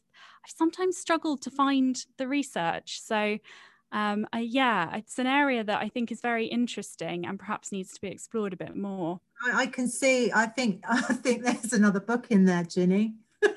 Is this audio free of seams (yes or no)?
yes